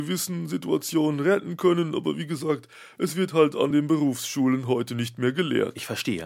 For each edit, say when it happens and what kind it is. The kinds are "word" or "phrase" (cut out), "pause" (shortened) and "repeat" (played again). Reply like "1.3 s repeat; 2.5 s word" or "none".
none